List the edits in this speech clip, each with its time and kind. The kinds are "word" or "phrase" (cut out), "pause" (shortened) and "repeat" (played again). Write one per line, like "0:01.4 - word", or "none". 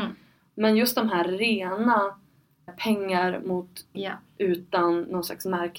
0:02.7 - word
0:03.9 - word